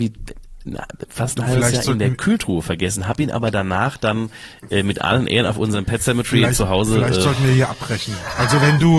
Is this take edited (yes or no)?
no